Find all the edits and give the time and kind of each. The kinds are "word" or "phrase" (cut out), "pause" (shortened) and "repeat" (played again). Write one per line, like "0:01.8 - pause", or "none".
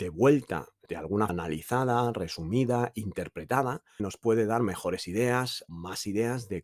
0:01.3 - word
0:05.7 - word